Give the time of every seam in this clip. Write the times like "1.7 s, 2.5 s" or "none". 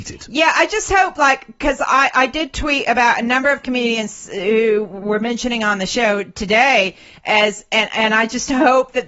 none